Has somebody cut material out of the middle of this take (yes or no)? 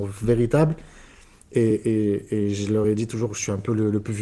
no